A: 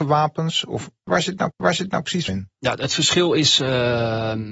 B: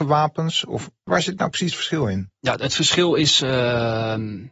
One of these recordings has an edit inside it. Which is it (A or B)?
A